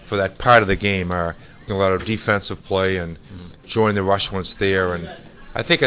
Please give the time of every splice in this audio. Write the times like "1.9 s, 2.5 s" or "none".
1.7 s, 2.0 s, 3.6 s